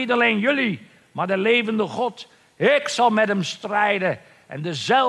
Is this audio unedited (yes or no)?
yes